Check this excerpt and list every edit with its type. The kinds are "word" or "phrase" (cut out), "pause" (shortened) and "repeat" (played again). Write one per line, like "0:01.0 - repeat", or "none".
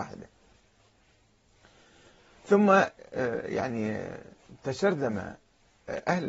none